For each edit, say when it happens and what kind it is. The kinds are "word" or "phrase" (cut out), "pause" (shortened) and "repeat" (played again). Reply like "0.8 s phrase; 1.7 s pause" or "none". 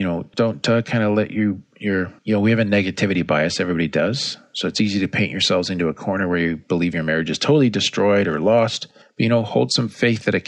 none